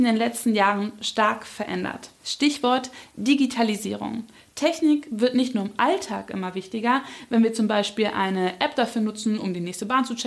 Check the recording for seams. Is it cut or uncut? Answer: uncut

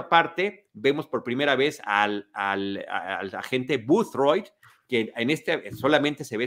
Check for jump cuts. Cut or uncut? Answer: uncut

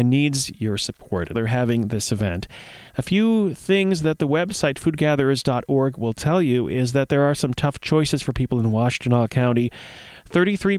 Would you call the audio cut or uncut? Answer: cut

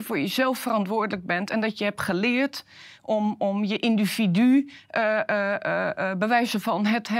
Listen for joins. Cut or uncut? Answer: uncut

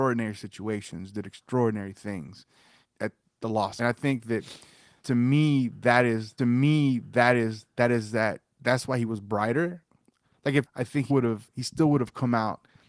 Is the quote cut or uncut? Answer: cut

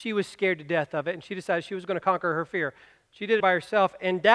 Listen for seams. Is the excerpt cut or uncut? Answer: cut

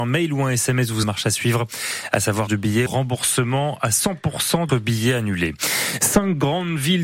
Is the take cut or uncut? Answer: cut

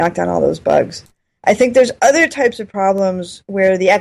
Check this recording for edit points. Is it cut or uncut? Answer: uncut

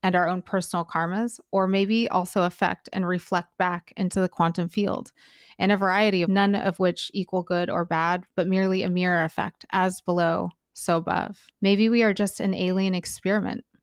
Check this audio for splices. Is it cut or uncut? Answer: cut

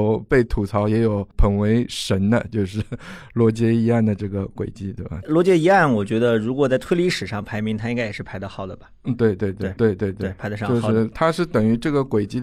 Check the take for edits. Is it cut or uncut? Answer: cut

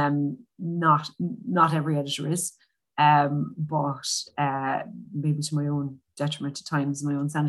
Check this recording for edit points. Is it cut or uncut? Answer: uncut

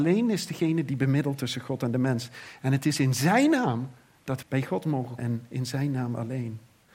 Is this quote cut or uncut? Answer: cut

